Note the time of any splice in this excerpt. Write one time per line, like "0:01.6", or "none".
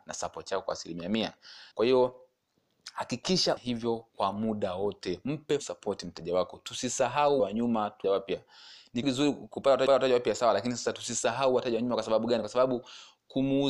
0:01.7
0:03.6
0:04.1
0:05.6
0:07.4
0:08.0
0:09.0
0:09.9